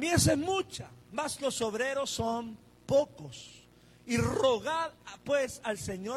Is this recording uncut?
yes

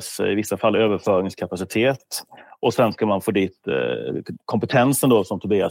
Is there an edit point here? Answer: no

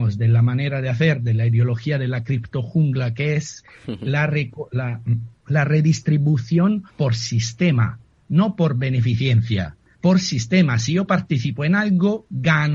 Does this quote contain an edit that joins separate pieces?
yes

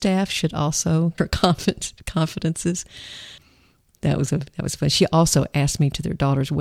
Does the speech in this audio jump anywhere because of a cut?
yes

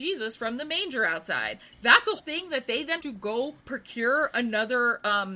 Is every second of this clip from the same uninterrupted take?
no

